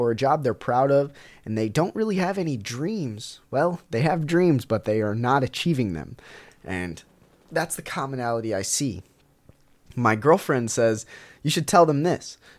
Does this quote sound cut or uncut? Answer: uncut